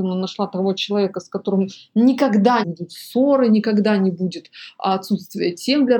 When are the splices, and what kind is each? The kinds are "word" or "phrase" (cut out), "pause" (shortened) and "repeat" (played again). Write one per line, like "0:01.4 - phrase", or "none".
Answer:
0:02.6 - word